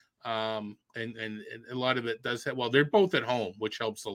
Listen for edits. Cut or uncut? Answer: uncut